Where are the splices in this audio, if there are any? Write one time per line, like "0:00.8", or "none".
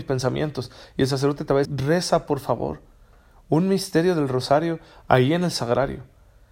0:01.6